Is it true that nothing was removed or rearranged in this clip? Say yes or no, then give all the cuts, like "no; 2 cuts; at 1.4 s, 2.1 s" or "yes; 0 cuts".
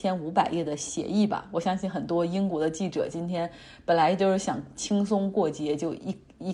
yes; 0 cuts